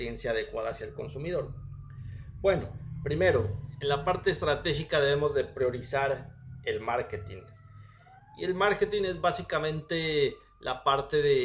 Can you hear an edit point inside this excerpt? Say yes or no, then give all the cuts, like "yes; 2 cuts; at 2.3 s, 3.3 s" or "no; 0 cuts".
no; 0 cuts